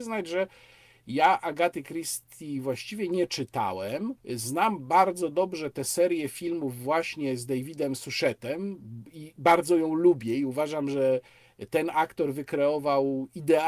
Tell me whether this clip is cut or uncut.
cut